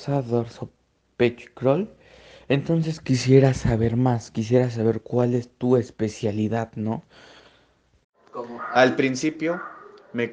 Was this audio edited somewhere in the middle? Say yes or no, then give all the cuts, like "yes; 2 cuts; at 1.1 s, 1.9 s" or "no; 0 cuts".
no; 0 cuts